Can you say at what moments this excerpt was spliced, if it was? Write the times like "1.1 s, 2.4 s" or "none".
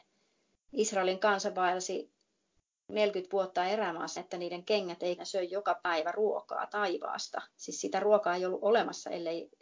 4.2 s, 5.2 s, 7.5 s